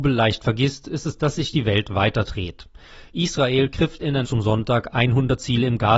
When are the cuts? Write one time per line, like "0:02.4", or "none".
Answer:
0:04.2